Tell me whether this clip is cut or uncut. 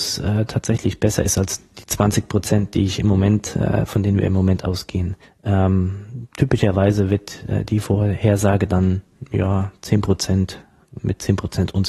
cut